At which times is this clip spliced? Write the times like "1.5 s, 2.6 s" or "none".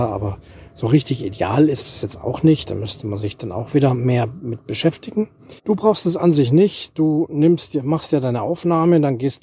5.6 s